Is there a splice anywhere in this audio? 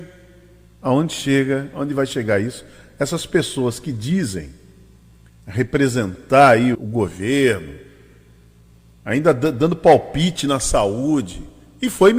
yes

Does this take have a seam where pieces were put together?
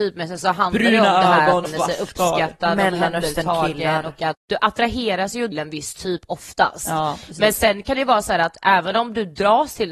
yes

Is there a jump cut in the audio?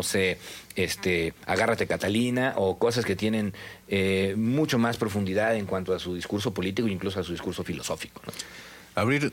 no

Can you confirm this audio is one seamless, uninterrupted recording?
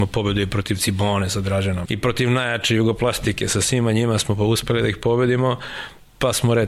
no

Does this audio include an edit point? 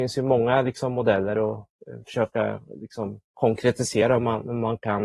yes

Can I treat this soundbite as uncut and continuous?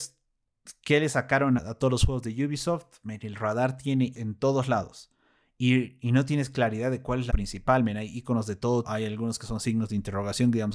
no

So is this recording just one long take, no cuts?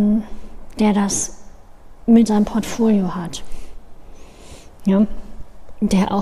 no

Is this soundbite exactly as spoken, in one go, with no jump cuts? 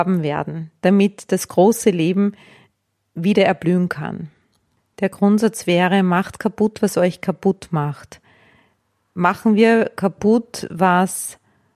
yes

